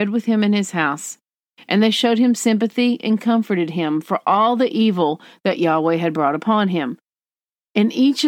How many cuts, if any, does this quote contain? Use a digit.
0